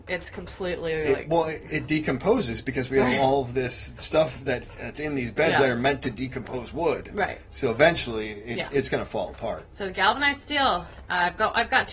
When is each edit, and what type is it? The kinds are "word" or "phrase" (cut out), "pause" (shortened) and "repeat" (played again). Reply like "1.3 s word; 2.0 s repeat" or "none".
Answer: none